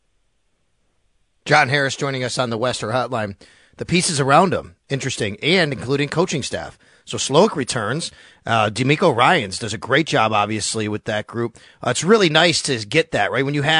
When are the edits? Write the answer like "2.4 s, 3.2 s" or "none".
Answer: none